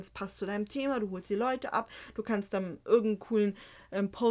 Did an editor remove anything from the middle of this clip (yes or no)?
no